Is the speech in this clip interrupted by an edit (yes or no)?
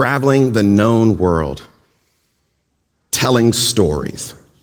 no